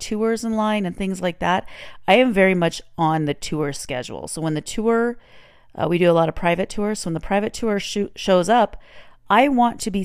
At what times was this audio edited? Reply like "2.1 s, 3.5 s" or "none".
none